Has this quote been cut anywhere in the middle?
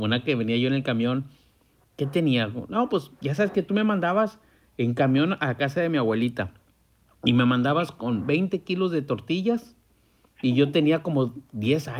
no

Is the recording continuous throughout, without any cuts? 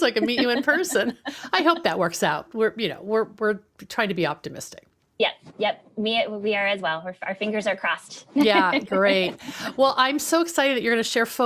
yes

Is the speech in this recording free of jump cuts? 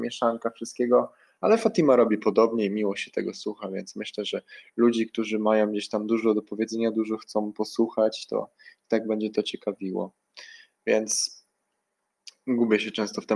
yes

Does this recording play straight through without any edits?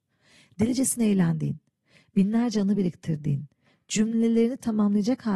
yes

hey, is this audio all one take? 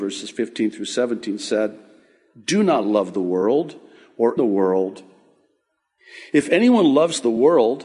no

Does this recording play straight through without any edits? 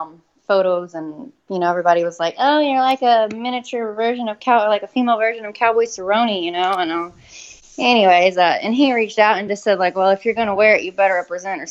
yes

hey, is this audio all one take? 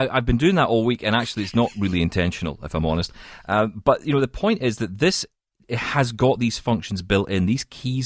yes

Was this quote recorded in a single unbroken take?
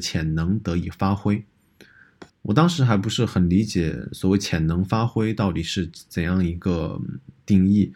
no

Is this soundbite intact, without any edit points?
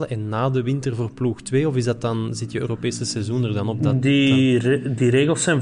yes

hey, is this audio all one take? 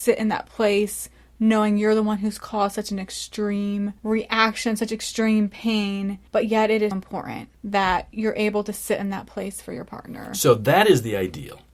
no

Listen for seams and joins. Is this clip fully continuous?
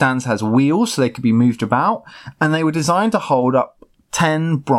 yes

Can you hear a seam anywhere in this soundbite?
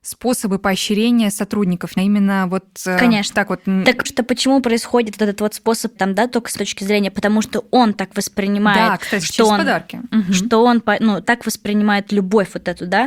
yes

